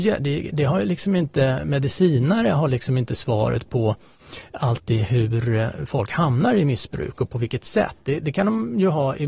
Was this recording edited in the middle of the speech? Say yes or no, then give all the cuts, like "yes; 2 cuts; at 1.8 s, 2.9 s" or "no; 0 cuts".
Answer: no; 0 cuts